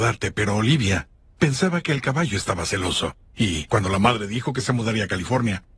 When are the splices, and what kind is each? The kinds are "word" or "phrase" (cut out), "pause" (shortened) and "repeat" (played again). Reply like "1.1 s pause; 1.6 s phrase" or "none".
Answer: none